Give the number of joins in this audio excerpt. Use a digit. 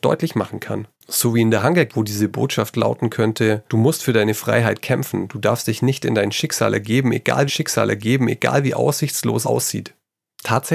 5